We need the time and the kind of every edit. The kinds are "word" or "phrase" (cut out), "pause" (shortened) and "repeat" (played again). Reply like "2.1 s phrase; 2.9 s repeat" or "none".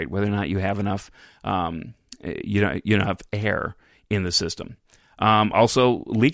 none

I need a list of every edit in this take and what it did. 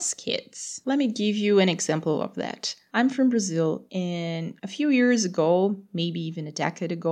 none

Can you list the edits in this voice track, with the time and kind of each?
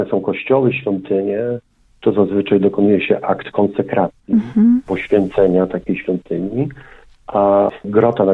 none

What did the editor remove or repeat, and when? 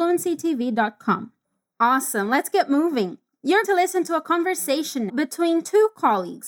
3.6 s word; 5.1 s word

